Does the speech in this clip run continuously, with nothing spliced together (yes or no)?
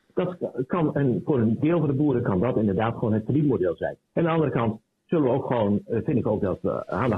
no